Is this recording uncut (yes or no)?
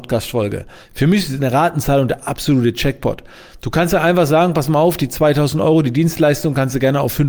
yes